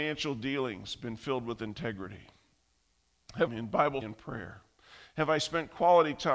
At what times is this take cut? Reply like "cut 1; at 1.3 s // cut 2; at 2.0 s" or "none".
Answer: cut 1; at 3.5 s // cut 2; at 4.0 s